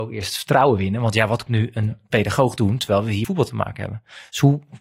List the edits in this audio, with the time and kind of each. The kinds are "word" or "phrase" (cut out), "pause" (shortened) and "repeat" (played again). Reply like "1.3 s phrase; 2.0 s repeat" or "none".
1.5 s word; 3.2 s word

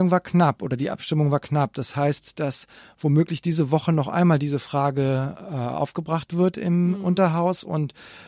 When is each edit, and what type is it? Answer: none

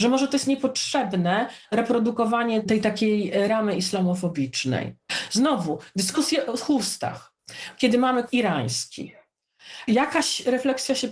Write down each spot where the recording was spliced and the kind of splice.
2.6 s word; 8.3 s word

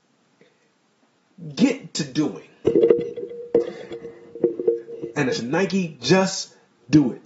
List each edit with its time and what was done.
5.3 s phrase

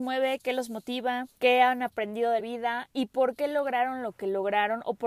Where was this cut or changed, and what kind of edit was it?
1.4 s pause; 2.4 s word

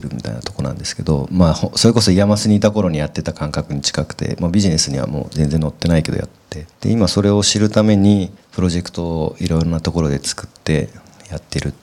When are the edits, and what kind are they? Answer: 6.7 s pause; 8.4 s pause

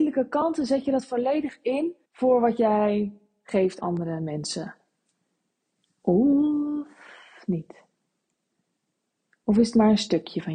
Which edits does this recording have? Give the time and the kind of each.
2.0 s pause; 3.8 s word

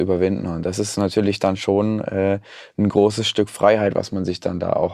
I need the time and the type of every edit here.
none

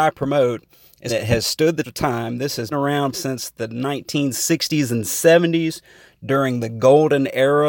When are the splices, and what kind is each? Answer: 1.1 s word; 1.8 s word; 2.7 s word; 3.1 s word

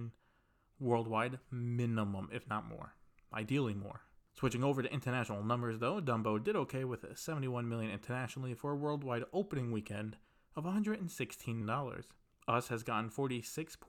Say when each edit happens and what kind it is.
11.6 s word

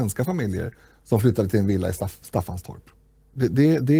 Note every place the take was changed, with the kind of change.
none

